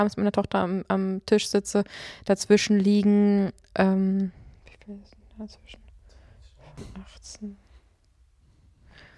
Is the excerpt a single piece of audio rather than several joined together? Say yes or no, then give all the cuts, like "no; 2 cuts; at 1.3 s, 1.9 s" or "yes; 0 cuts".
yes; 0 cuts